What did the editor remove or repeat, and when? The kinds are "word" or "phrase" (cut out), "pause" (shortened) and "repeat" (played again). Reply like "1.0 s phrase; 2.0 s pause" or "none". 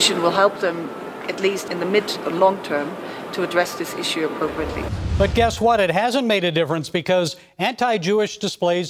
1.7 s word